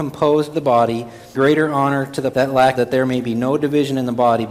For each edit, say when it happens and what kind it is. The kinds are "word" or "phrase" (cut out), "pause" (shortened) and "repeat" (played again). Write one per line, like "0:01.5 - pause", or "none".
0:01.3 - word
0:02.3 - word
0:02.7 - word

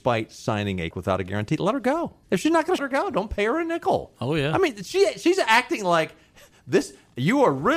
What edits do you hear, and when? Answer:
0:00.9 - word
0:02.2 - pause
0:02.8 - phrase

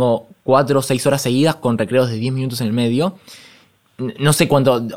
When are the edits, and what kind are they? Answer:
none

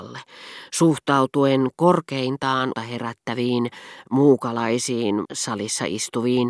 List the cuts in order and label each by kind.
0:01.7 - word
0:02.7 - word
0:05.2 - word

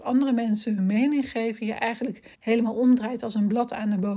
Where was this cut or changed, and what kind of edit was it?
0:02.3 - pause

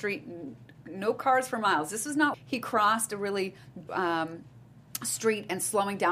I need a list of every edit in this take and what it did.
0:02.3 - word
0:03.9 - word

